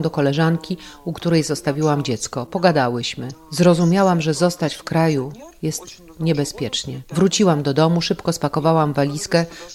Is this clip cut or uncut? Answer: uncut